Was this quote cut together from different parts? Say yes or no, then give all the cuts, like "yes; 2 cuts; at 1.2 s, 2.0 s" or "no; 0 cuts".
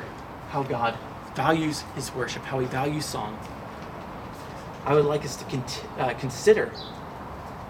no; 0 cuts